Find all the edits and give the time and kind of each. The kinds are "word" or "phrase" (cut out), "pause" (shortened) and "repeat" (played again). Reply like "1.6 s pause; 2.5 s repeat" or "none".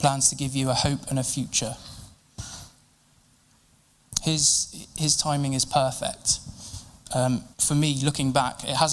7.5 s pause